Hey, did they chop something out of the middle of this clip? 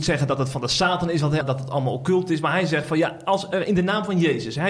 yes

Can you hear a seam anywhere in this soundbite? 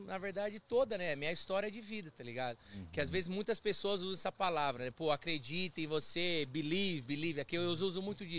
no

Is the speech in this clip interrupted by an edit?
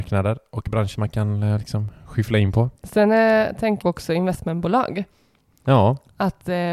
yes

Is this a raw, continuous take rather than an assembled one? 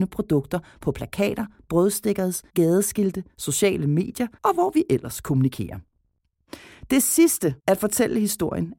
no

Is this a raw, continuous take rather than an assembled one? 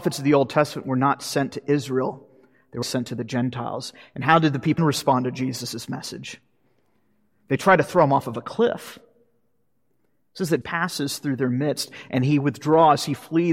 no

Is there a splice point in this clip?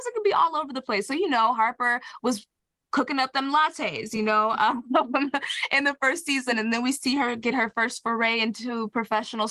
no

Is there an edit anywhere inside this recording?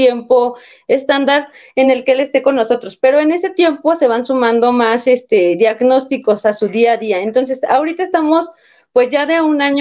no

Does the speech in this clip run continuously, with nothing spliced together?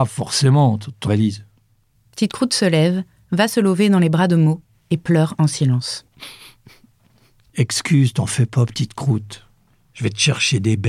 no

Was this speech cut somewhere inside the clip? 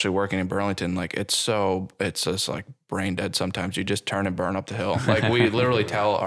no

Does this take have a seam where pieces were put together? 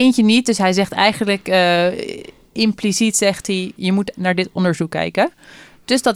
no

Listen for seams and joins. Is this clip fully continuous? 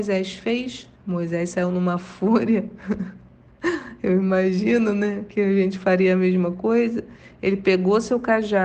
no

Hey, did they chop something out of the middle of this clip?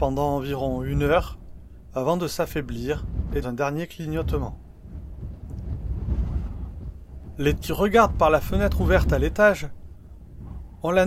yes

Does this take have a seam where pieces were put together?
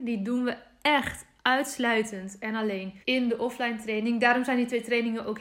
yes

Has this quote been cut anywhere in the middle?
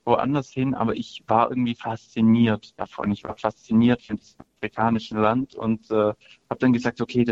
no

